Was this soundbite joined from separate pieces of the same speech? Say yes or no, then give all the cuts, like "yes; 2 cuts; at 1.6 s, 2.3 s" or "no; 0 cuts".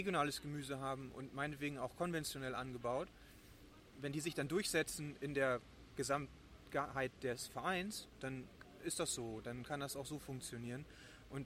no; 0 cuts